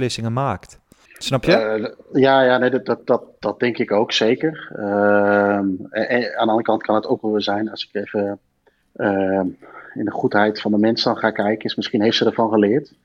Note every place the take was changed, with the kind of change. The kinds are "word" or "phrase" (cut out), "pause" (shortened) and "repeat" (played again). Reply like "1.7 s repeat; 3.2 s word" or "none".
1.0 s pause; 8.8 s pause

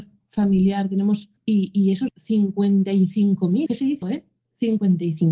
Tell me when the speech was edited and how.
1.4 s pause; 2.1 s word; 3.7 s word; 4.0 s word

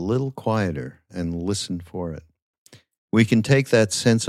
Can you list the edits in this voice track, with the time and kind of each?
none

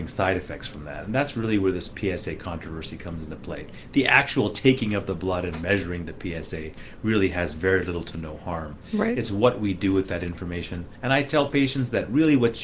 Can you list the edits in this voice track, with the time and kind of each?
none

